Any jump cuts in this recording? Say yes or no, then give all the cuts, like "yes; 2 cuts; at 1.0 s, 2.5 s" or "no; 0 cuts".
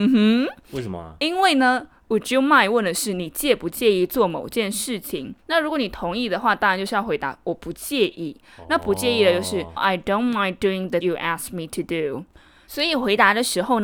yes; 3 cuts; at 5.4 s, 9.8 s, 11.0 s